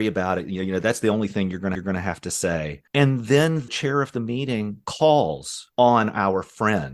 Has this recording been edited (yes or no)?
yes